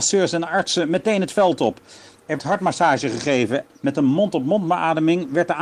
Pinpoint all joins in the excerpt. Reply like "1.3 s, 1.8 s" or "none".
2.4 s, 3.7 s